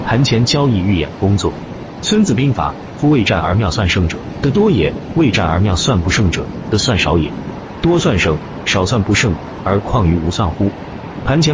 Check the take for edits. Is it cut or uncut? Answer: uncut